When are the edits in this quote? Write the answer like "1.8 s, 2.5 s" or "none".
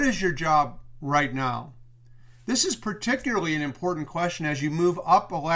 none

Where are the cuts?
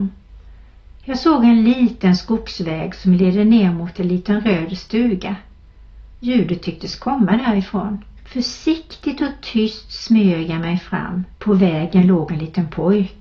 8.2 s, 11.3 s

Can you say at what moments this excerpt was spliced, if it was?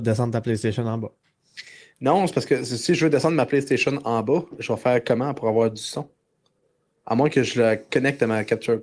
none

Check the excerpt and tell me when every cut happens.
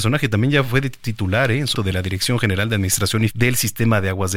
1.7 s, 3.3 s

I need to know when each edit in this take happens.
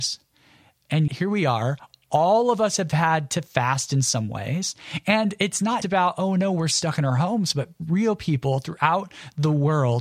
1.1 s, 5.8 s

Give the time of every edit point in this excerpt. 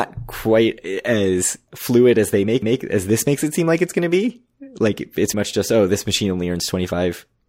2.6 s, 5.3 s

